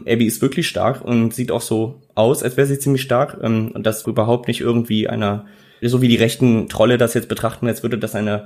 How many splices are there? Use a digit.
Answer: 2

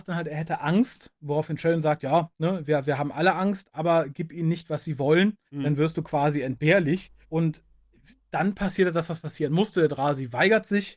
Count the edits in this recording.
2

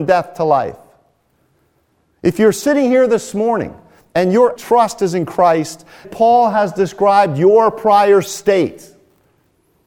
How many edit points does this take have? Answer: 2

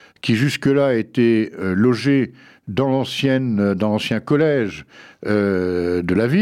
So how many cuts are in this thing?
0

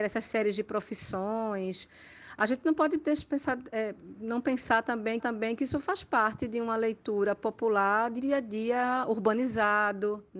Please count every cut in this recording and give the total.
2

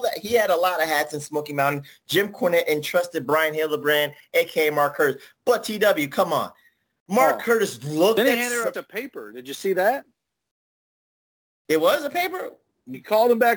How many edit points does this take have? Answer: 1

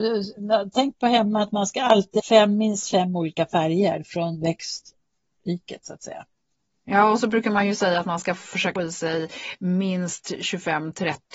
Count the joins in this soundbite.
2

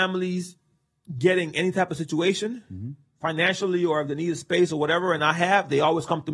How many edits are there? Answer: 0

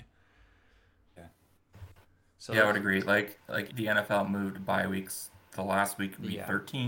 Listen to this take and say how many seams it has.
1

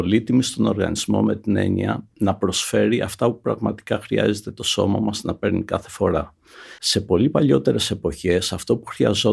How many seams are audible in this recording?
1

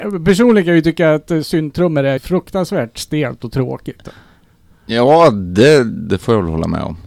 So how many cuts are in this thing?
1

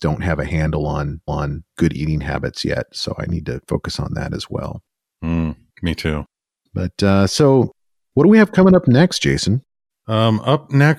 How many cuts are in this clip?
1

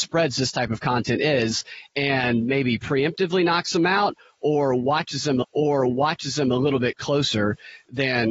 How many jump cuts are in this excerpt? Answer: 1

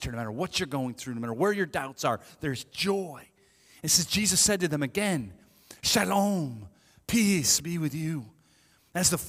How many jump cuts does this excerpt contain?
0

